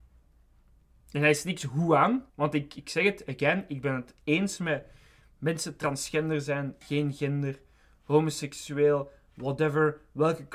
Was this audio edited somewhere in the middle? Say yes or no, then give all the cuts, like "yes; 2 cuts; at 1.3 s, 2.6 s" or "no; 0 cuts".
yes; 1 cut; at 2.3 s